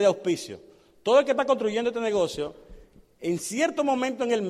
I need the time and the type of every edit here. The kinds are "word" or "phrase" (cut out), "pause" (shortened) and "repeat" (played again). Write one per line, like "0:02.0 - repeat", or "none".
none

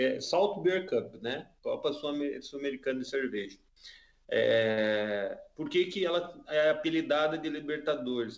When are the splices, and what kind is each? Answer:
none

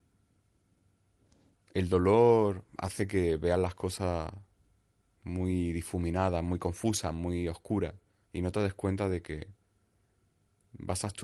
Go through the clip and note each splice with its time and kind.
0:08.2 - pause

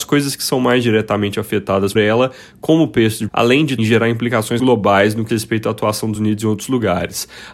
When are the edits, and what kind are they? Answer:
0:02.0 - word
0:03.3 - word
0:03.8 - word
0:04.6 - word
0:05.3 - word
0:06.2 - word

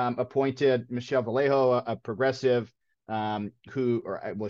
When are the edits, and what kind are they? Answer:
none

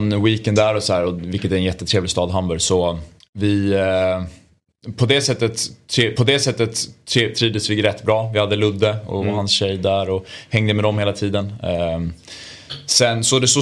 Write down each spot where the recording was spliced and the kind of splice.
0:03.2 - pause
0:06.2 - repeat

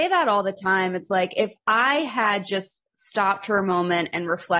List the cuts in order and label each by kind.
none

